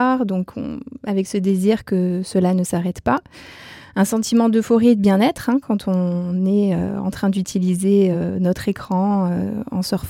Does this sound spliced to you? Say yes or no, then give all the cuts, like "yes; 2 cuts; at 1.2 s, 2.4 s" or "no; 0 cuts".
no; 0 cuts